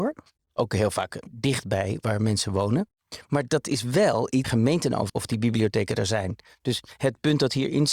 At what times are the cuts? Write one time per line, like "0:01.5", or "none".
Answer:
0:01.2
0:04.4
0:05.1